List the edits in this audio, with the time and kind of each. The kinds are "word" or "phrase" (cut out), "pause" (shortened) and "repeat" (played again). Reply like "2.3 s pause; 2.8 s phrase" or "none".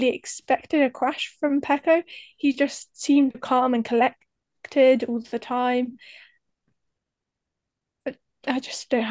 3.3 s word